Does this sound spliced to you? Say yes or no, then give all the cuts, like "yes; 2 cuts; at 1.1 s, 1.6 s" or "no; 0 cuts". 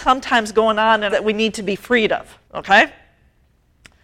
yes; 2 cuts; at 1.1 s, 2.5 s